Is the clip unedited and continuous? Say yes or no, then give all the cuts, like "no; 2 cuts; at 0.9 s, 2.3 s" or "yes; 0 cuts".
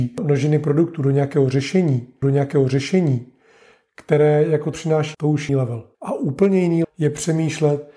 no; 6 cuts; at 2.2 s, 4.7 s, 5.1 s, 5.5 s, 5.9 s, 6.8 s